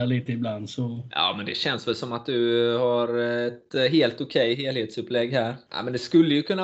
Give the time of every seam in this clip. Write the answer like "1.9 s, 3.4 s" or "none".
none